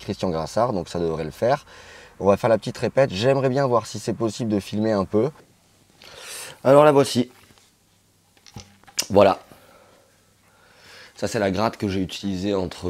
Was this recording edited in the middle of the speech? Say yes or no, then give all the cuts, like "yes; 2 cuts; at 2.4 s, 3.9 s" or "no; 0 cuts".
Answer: no; 0 cuts